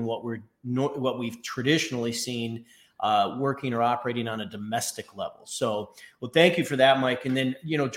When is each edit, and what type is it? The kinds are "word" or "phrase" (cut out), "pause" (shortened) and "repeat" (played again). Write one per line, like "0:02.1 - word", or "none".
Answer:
none

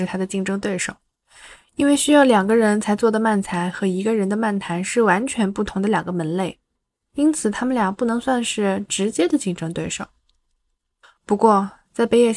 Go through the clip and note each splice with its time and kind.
none

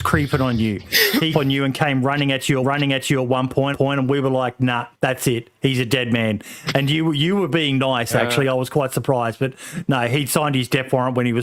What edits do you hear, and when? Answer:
0:01.3 - phrase
0:02.6 - repeat
0:03.7 - repeat
0:04.9 - pause

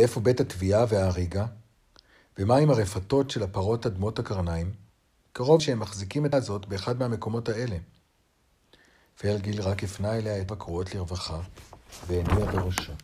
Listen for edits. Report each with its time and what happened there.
0:05.6 - word
0:06.3 - word
0:10.5 - word

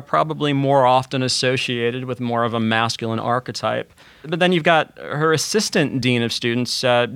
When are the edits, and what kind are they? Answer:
none

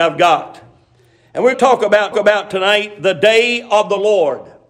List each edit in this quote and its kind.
0:01.5 - word
0:02.1 - repeat

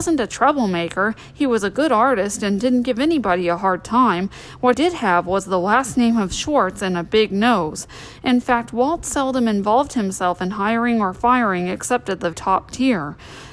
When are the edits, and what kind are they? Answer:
0:04.7 - word
0:12.3 - word

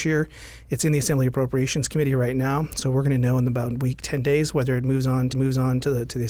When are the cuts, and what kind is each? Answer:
0:05.3 - repeat

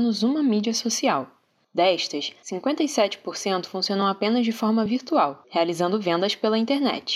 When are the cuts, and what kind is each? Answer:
none

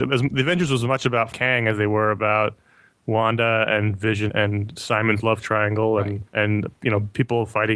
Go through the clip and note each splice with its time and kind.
0:01.3 - word
0:04.3 - word
0:06.3 - pause

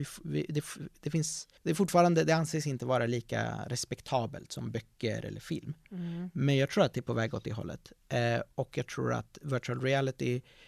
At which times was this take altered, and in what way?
0:01.6 - pause

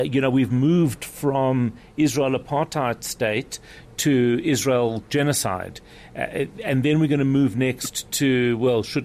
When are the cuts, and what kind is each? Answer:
none

